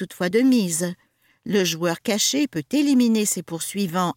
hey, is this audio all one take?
yes; 0 cuts

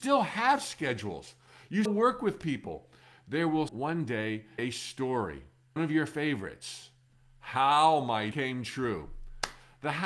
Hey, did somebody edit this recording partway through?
yes; 5 cuts; at 1.9 s, 3.7 s, 4.6 s, 5.8 s, 8.3 s

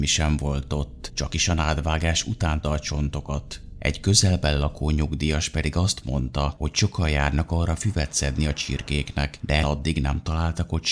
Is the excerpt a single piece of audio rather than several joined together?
no; 2 cuts; at 2.6 s, 9.6 s

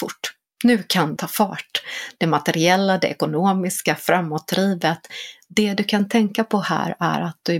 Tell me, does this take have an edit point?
yes; 1 cut; at 1.2 s

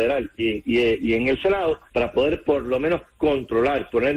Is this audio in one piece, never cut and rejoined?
no; 1 cut; at 1.9 s

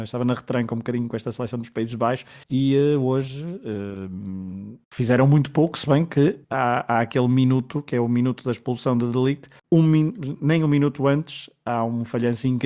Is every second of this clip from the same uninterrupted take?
no; 4 cuts; at 2.4 s, 4.8 s, 6.4 s, 9.6 s

